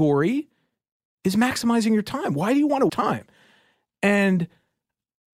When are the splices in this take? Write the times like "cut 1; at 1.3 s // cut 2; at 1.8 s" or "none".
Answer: cut 1; at 2.9 s

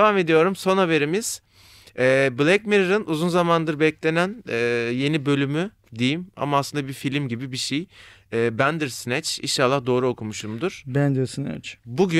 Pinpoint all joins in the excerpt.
none

